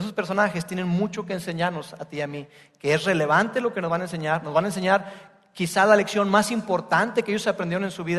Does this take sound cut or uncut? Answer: uncut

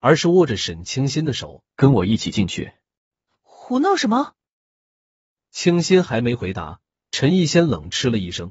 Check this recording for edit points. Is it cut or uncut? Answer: cut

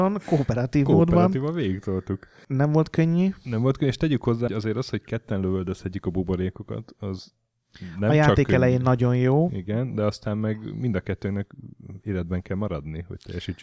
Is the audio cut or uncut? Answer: cut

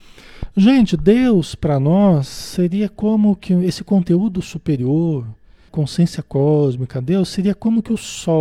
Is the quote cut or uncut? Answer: cut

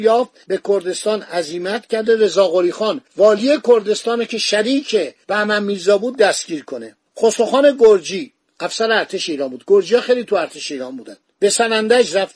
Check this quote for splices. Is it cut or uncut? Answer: uncut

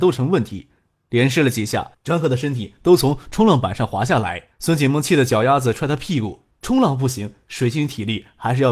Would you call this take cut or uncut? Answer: cut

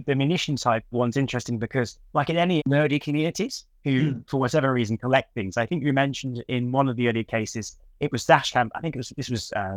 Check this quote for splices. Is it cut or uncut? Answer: cut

